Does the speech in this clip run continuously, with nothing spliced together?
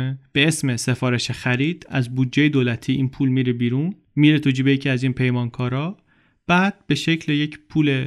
yes; 0 cuts

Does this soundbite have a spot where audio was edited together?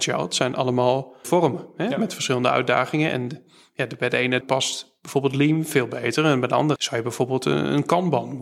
yes; 3 cuts; at 1.2 s, 4.4 s, 6.8 s

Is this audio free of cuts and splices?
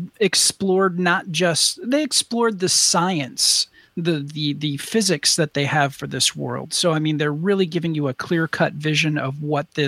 yes; 0 cuts

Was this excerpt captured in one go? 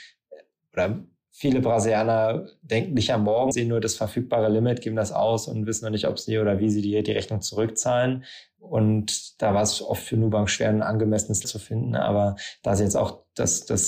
no; 2 cuts; at 3.5 s, 11.4 s

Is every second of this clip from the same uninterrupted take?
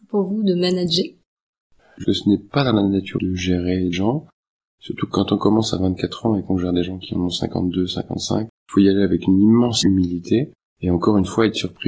no; 5 cuts; at 2.0 s, 3.2 s, 3.9 s, 8.6 s, 10.6 s

